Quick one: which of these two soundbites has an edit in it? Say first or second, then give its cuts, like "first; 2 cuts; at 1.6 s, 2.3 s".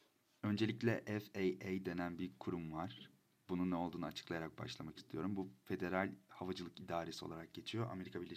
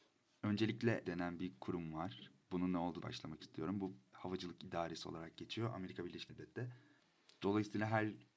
second; 5 cuts; at 1.0 s, 2.4 s, 3.0 s, 4.1 s, 6.3 s